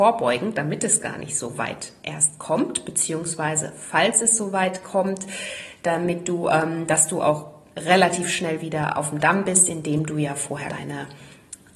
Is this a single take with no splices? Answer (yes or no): no